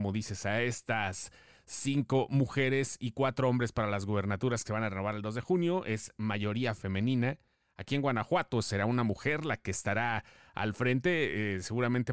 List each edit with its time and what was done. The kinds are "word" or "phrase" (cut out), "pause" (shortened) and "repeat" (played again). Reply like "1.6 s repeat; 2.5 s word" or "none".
none